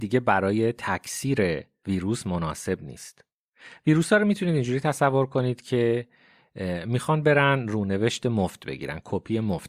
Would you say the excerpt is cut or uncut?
uncut